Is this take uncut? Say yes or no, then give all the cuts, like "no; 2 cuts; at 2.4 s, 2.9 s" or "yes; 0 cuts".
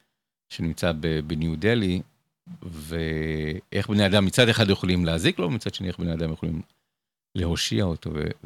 yes; 0 cuts